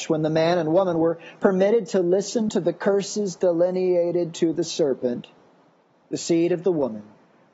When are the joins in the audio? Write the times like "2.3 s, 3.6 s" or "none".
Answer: none